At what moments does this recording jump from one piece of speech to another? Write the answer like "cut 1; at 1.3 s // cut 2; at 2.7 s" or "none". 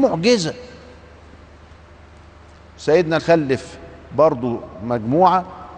cut 1; at 3.2 s